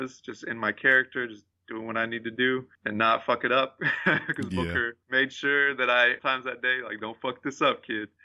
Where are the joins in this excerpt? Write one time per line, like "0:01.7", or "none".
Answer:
0:02.7
0:05.0
0:06.2